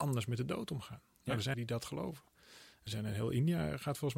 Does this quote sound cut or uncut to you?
cut